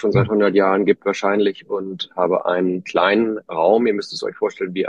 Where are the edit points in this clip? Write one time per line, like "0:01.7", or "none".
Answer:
none